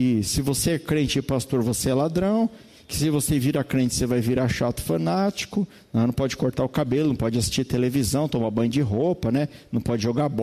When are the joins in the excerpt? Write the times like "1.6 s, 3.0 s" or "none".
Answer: none